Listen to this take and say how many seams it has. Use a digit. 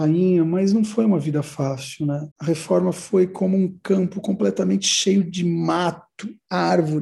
1